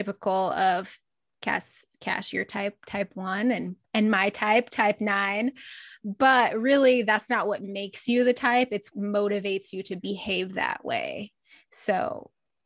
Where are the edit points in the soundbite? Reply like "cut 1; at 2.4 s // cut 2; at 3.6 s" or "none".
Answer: cut 1; at 8.9 s